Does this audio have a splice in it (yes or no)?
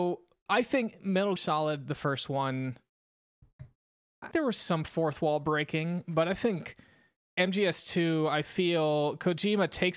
yes